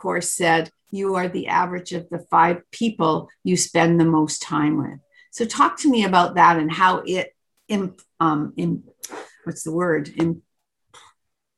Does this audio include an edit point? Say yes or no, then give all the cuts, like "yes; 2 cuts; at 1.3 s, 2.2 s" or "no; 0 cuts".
no; 0 cuts